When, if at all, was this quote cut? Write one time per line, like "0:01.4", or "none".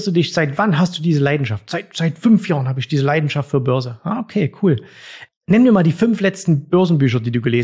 none